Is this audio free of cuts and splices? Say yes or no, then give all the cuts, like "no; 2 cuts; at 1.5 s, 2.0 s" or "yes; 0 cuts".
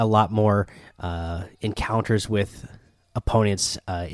yes; 0 cuts